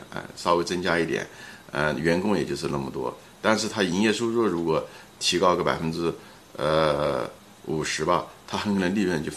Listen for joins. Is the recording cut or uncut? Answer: uncut